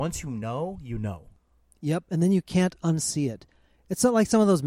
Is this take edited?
no; 0 cuts

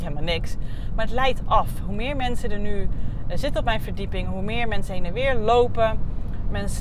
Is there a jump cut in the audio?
no; 0 cuts

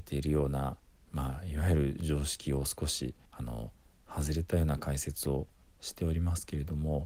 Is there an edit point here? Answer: yes; 1 cut; at 3.3 s

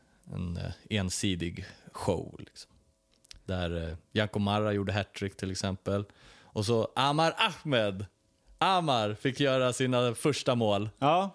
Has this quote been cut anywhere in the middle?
no; 0 cuts

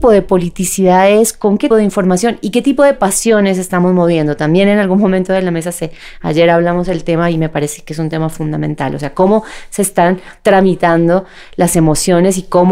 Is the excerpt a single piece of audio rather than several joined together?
no; 1 cut; at 1.7 s

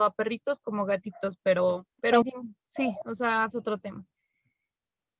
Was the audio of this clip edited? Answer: yes; 3 cuts; at 1.9 s, 2.2 s, 3.5 s

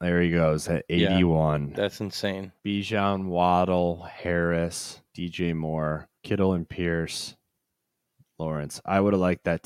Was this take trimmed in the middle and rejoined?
yes; 3 cuts; at 2.6 s, 5.1 s, 6.2 s

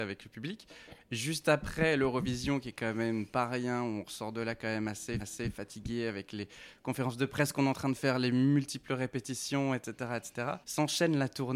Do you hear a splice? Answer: yes; 2 cuts; at 5.2 s, 10.6 s

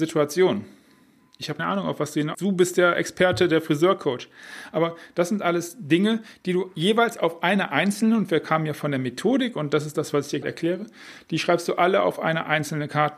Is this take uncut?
no; 3 cuts; at 1.6 s, 2.3 s, 10.4 s

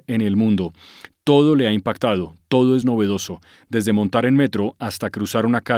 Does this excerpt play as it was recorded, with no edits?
yes; 0 cuts

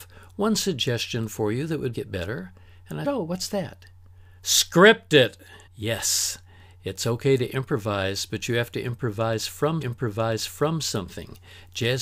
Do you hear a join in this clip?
yes; 4 cuts; at 1.9 s, 3.0 s, 5.7 s, 9.8 s

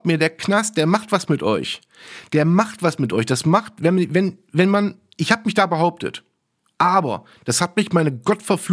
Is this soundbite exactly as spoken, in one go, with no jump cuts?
yes; 0 cuts

